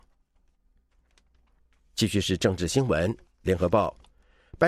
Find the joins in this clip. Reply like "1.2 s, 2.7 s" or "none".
3.2 s

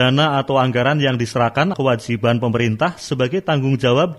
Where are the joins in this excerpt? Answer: 1.7 s

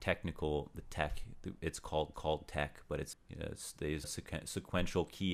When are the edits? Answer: 2.1 s, 3.1 s, 4.0 s

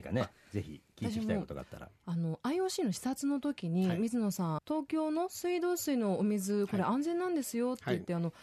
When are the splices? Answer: 2.0 s, 4.6 s

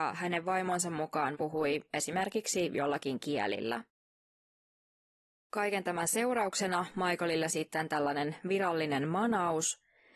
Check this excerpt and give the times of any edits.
1.3 s, 7.5 s

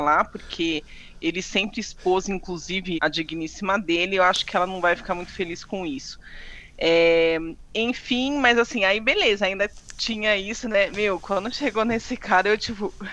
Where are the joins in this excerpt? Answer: 2.9 s

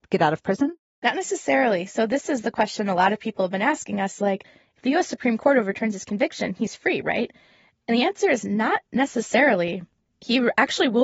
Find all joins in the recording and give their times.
none

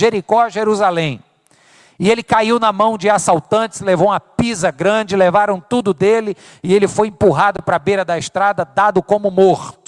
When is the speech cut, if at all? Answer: none

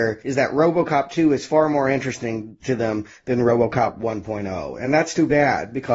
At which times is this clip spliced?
none

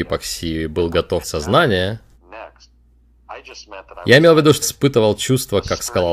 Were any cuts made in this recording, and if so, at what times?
1.2 s, 4.6 s

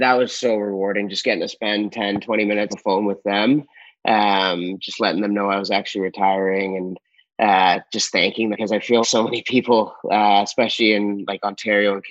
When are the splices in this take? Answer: 2.7 s, 8.5 s, 9.0 s

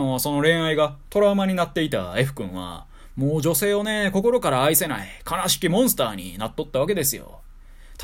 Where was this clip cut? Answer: none

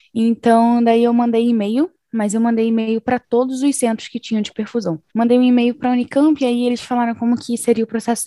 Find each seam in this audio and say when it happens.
5.1 s

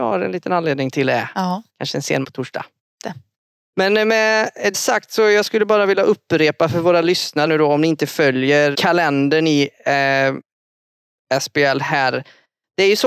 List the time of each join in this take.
2.2 s, 4.7 s, 7.5 s, 8.7 s

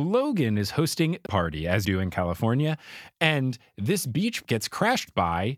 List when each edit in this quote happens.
1.3 s, 1.8 s, 4.4 s

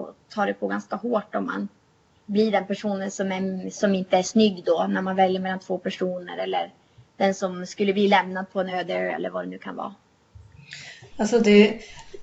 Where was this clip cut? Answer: none

